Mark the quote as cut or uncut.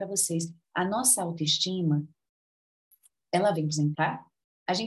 cut